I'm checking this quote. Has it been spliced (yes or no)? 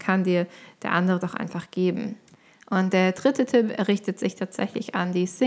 yes